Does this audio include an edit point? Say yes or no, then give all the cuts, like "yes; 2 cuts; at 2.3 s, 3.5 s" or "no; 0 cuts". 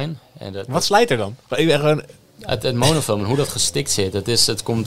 no; 0 cuts